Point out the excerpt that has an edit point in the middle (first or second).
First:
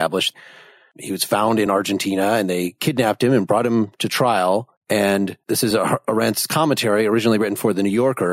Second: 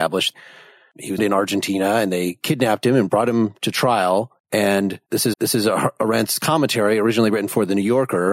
second